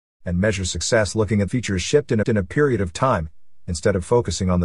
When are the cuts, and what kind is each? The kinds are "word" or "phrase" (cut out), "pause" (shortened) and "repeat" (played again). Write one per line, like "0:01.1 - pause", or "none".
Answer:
0:01.5 - phrase
0:02.2 - repeat